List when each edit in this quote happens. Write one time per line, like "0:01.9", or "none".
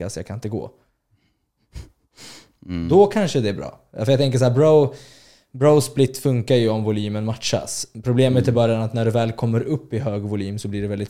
none